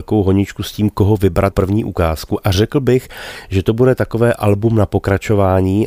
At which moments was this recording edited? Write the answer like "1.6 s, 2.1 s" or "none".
1.5 s